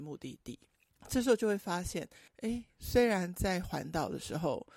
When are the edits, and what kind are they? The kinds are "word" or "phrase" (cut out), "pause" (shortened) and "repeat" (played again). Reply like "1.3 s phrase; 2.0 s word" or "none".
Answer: 2.3 s pause